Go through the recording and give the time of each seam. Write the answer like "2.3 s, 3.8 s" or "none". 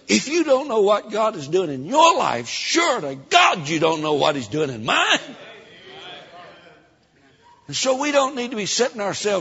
none